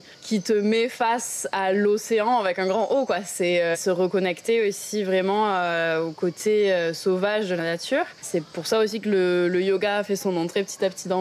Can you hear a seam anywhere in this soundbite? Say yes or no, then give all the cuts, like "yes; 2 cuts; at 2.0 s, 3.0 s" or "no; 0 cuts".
yes; 1 cut; at 8.2 s